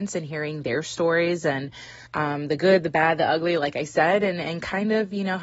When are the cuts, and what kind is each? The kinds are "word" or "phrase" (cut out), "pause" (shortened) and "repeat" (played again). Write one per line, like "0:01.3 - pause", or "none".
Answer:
0:02.1 - pause